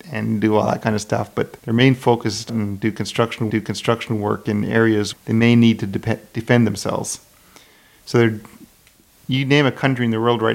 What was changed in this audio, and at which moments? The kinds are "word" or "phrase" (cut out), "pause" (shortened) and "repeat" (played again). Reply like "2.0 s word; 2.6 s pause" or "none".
1.6 s pause; 2.5 s phrase; 3.5 s repeat; 5.1 s word